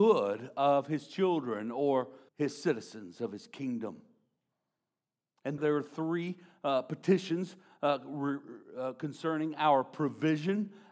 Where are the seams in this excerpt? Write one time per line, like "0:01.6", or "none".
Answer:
0:02.3
0:05.6